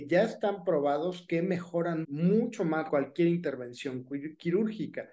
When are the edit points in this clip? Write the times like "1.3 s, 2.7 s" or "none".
2.0 s, 2.9 s